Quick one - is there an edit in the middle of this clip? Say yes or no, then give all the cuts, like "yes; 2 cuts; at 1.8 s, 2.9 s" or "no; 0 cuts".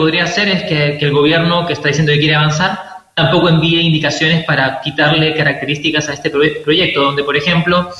no; 0 cuts